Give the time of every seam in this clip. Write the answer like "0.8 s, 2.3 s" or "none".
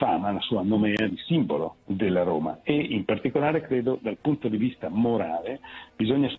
1.8 s